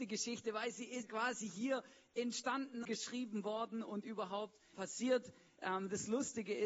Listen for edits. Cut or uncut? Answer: cut